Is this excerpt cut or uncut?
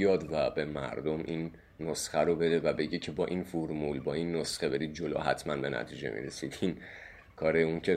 uncut